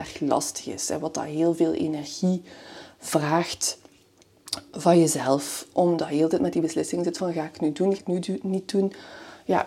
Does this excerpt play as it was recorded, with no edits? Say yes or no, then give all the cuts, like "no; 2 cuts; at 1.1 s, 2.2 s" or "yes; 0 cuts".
no; 1 cut; at 8.0 s